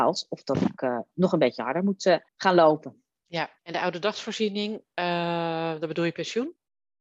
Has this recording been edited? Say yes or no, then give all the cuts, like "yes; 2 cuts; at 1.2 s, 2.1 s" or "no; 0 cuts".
yes; 2 cuts; at 2.3 s, 3.6 s